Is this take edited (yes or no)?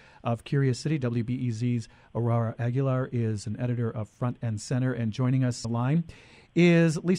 yes